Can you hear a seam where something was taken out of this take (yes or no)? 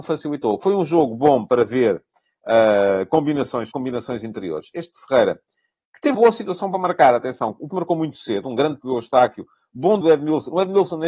yes